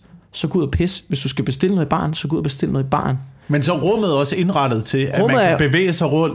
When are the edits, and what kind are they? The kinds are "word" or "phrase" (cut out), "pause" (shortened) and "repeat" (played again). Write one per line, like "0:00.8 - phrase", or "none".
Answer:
none